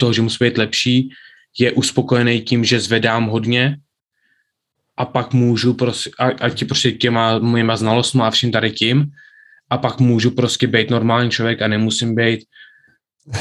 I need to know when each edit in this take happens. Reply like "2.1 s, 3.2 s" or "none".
none